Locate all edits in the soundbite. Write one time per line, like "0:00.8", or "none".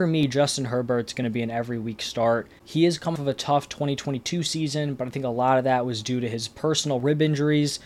0:03.2